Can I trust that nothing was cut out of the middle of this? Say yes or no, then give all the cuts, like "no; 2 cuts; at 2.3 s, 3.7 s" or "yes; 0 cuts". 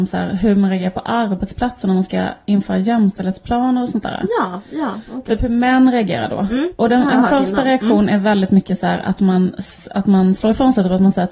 yes; 0 cuts